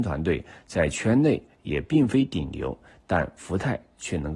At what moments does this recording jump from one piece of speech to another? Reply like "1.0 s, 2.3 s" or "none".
none